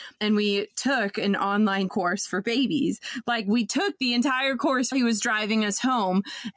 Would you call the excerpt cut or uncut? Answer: cut